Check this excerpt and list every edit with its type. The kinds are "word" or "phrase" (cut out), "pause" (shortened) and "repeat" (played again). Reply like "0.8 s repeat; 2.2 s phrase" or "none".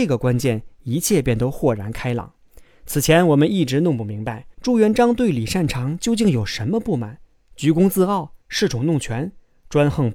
4.5 s pause; 8.4 s pause